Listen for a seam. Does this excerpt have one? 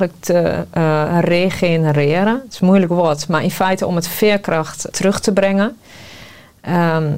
yes; 1 cut; at 4.9 s

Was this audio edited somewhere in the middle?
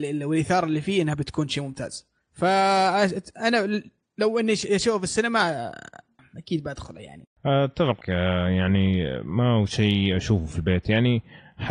yes; 1 cut; at 8.0 s

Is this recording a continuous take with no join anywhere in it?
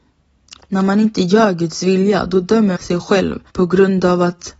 no; 2 cuts; at 2.8 s, 3.5 s

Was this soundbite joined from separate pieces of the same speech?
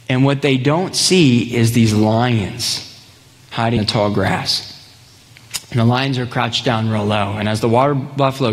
yes; 1 cut; at 3.8 s

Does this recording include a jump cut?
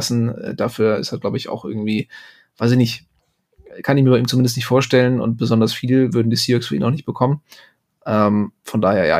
no; 0 cuts

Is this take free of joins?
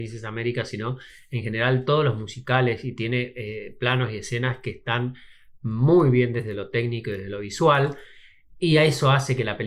yes; 0 cuts

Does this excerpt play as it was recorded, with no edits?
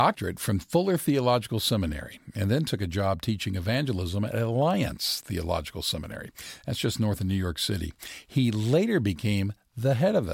yes; 0 cuts

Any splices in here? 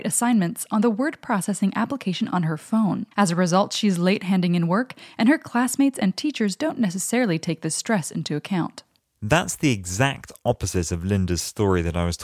yes; 1 cut; at 3.1 s

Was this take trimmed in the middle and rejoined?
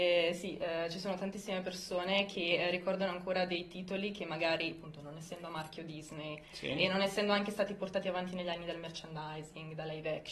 no; 0 cuts

